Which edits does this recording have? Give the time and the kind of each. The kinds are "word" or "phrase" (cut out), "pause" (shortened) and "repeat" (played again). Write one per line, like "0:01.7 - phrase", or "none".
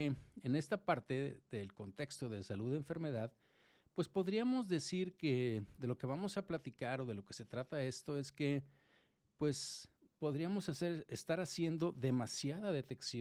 none